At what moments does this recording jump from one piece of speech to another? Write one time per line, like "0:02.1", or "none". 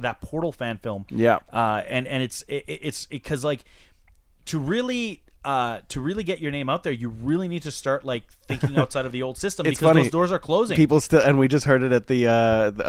none